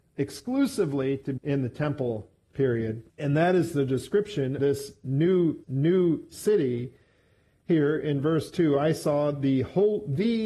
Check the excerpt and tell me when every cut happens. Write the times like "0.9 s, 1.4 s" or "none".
1.4 s, 3.1 s, 4.6 s, 5.6 s